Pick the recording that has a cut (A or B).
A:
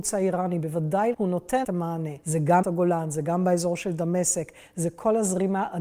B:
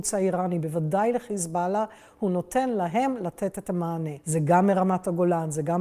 A